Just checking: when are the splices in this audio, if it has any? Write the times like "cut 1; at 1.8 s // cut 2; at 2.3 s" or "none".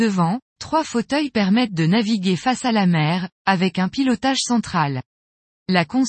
none